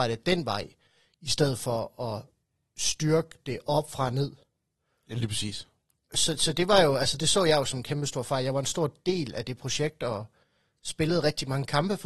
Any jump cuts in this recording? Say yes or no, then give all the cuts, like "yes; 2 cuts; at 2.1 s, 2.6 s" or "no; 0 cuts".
no; 0 cuts